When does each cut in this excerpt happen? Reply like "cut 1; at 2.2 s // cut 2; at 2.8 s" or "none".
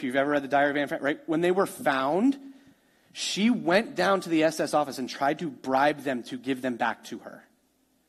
none

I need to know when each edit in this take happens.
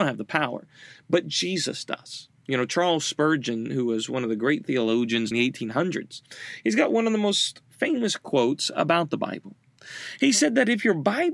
cut 1; at 2.4 s // cut 2; at 5.3 s

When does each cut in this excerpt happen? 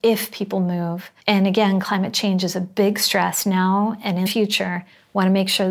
cut 1; at 1.2 s // cut 2; at 4.3 s

